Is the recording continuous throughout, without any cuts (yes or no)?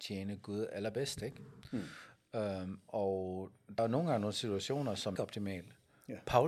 no